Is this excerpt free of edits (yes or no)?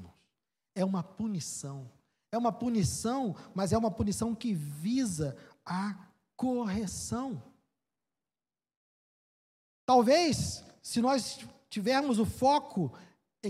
yes